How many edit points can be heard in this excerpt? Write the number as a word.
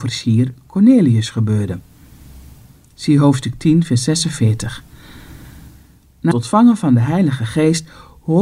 one